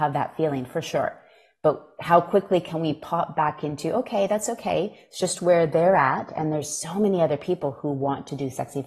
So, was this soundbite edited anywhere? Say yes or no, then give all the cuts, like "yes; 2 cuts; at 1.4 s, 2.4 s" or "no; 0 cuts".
no; 0 cuts